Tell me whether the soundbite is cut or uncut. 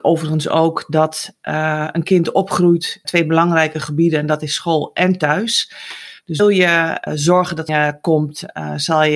cut